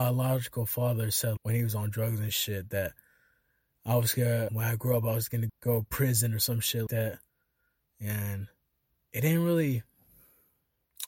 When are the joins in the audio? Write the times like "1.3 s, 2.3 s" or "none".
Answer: 1.4 s, 4.5 s, 5.5 s, 6.9 s